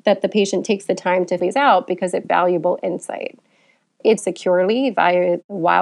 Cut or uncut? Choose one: cut